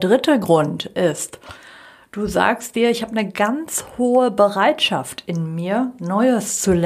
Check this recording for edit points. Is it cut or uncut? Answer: uncut